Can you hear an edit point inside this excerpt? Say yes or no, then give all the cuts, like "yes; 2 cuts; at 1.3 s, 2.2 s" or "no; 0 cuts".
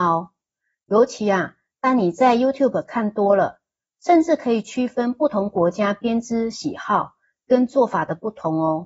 no; 0 cuts